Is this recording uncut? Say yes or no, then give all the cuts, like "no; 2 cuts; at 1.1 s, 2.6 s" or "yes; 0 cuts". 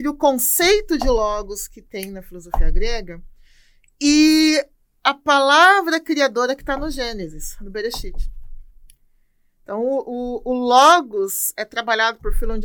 yes; 0 cuts